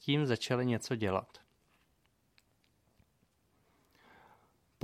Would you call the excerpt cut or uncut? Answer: uncut